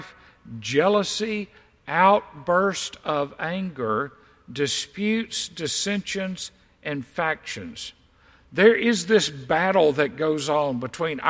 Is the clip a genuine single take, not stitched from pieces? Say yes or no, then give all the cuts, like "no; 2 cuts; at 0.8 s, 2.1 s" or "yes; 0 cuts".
yes; 0 cuts